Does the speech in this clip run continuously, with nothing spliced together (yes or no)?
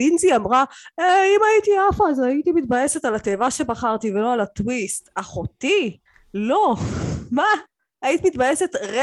yes